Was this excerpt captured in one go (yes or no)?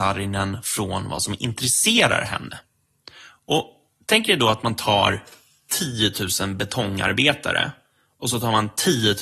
yes